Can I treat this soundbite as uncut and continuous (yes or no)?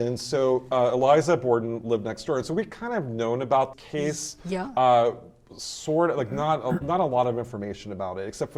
no